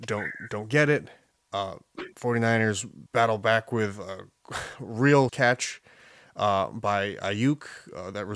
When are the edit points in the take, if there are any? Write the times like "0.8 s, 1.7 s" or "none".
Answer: 1.3 s, 3.1 s, 5.3 s